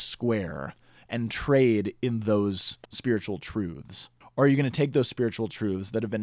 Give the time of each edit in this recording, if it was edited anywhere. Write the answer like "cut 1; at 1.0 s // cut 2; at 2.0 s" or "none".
cut 1; at 2.8 s // cut 2; at 4.2 s